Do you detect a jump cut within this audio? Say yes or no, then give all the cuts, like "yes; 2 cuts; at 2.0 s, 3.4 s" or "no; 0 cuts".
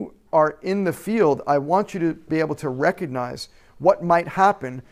no; 0 cuts